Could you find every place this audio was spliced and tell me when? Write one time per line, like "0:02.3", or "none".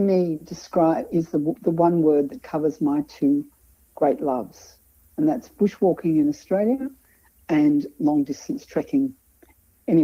none